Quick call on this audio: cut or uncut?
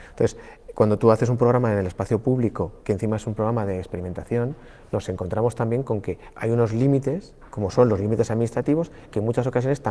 cut